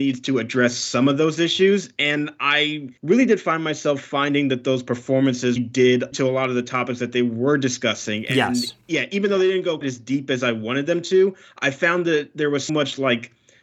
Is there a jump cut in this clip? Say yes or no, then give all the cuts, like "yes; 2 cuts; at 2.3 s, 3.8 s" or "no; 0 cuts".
yes; 6 cuts; at 3.0 s, 5.6 s, 6.1 s, 8.8 s, 9.8 s, 12.7 s